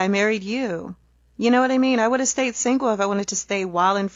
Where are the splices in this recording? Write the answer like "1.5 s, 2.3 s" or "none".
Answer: none